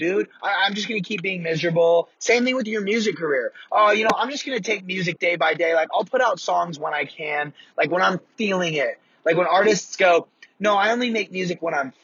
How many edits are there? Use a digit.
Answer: 0